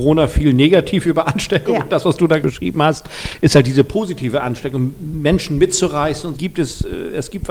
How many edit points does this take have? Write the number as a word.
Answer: two